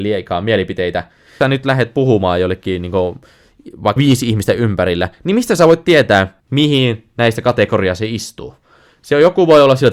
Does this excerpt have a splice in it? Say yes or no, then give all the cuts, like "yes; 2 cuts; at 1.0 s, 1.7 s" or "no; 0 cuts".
yes; 3 cuts; at 1.4 s, 4.0 s, 6.4 s